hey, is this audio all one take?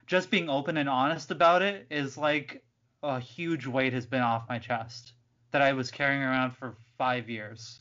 yes; 0 cuts

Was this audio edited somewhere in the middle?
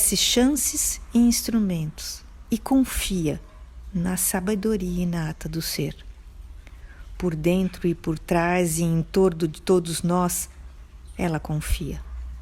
no; 0 cuts

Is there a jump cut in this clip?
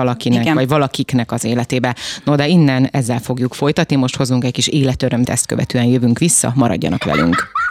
yes; 1 cut; at 5.3 s

